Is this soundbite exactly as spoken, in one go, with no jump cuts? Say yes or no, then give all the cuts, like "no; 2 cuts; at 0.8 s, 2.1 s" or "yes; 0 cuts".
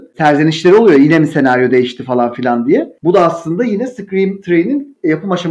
yes; 0 cuts